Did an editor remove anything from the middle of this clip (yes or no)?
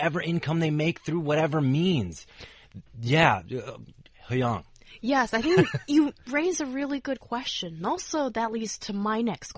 no